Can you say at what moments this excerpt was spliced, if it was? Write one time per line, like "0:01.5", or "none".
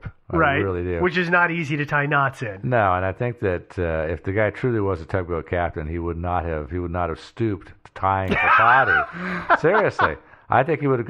none